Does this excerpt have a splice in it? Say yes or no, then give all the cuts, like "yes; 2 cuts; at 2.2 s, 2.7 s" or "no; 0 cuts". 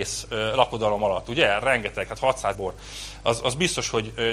yes; 1 cut; at 2.5 s